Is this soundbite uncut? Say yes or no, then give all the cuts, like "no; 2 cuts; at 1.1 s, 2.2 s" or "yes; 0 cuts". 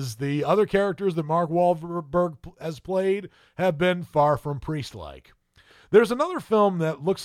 yes; 0 cuts